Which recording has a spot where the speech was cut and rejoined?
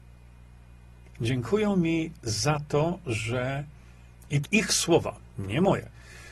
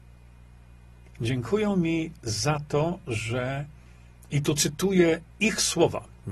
first; 1 cut; at 4.4 s

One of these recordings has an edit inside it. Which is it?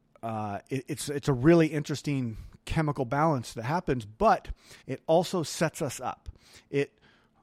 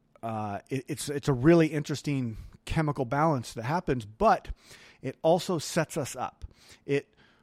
first; 1 cut; at 4.8 s

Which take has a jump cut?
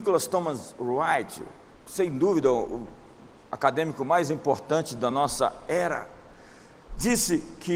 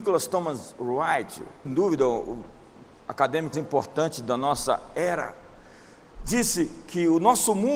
second; 2 cuts; at 1.6 s, 3.5 s

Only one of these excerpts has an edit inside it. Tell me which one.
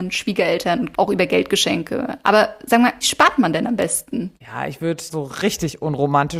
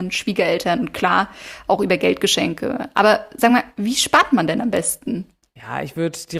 first; 4 cuts; at 0.9 s, 3.0 s, 4.4 s, 5.1 s

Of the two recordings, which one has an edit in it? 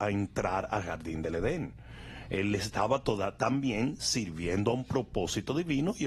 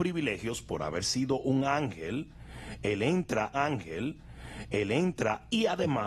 second; 1 cut; at 3.5 s

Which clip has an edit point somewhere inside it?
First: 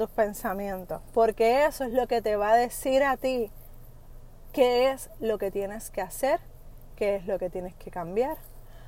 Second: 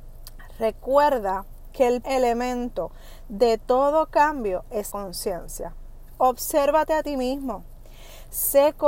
second; 2 cuts; at 2.0 s, 4.9 s

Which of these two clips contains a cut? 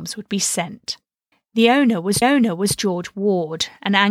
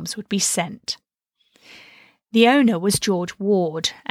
first; 2 cuts; at 1.3 s, 2.2 s

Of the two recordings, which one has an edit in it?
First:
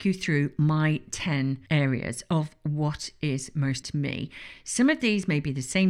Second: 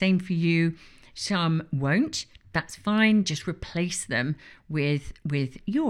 first; 2 cuts; at 1.7 s, 3.8 s

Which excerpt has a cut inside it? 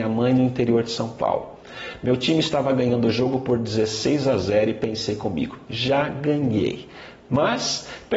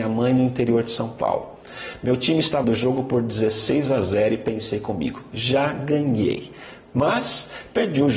second; 1 cut; at 2.6 s

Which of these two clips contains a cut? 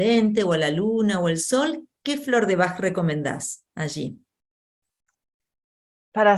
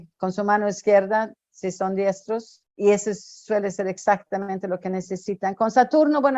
second; 1 cut; at 2.7 s

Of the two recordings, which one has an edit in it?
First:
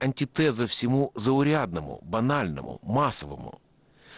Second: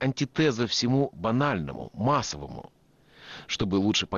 second; 1 cut; at 1.1 s

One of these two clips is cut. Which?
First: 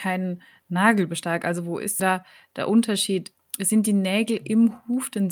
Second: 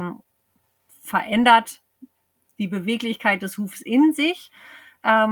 first; 1 cut; at 2.0 s

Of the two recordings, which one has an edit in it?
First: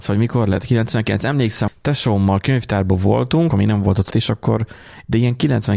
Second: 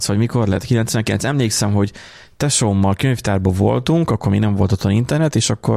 first; 3 cuts; at 1.7 s, 3.5 s, 4.1 s

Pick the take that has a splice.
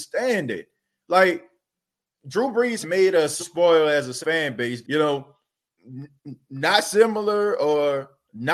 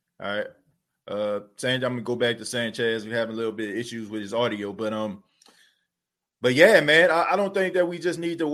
first; 6 cuts; at 2.1 s, 2.8 s, 3.4 s, 4.2 s, 4.8 s, 5.8 s

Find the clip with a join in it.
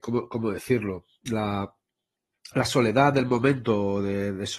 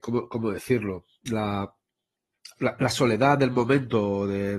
first; 1 cut; at 2.5 s

